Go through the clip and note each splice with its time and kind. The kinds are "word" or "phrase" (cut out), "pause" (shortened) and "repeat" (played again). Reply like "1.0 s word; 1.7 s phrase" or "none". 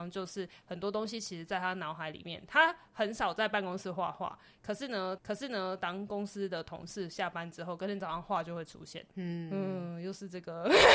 5.2 s repeat; 9.1 s pause